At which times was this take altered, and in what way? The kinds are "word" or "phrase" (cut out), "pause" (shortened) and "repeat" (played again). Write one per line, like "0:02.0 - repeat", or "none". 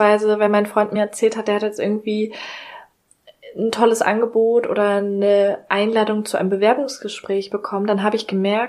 none

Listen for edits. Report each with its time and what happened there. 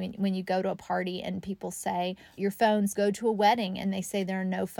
0:02.4 - word
0:02.9 - phrase

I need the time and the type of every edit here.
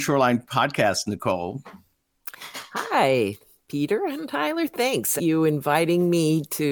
0:05.2 - phrase

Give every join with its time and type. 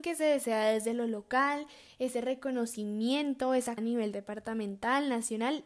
0:03.8 - word

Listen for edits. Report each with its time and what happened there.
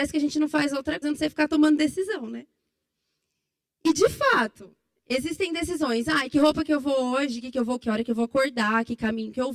0:01.0 - word
0:07.8 - word

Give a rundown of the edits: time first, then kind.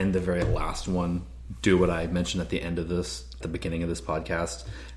0:03.4 - phrase

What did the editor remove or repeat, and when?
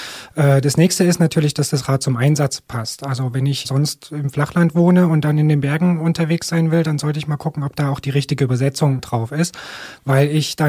0:03.6 - word

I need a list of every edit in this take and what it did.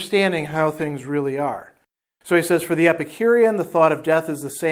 none

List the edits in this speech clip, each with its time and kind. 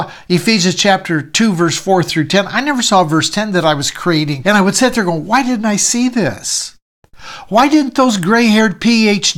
0:04.4 - word

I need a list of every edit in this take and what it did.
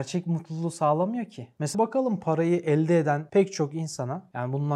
0:01.7 - word

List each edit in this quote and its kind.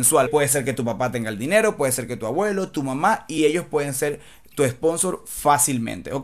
none

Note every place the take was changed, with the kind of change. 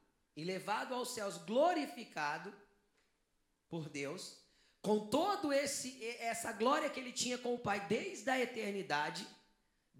none

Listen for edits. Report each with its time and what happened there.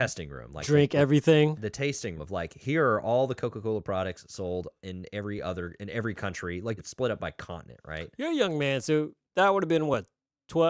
0:02.2 - word
0:06.8 - word

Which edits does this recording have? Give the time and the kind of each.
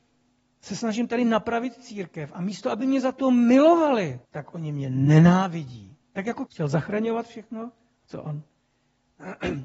0:04.2 - pause
0:06.0 - pause
0:06.5 - word

